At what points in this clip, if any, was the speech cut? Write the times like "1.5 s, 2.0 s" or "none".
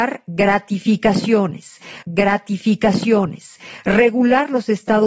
2.0 s